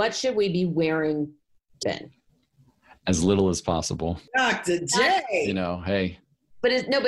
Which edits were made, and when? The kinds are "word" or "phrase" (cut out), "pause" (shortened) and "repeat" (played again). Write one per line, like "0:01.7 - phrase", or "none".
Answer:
0:01.8 - word